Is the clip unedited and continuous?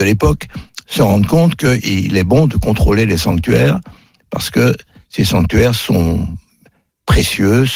yes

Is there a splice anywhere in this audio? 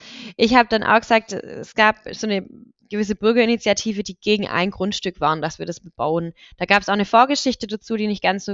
no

